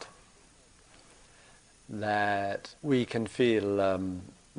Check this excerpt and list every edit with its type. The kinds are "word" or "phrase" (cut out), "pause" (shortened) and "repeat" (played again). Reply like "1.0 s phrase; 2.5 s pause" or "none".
2.8 s pause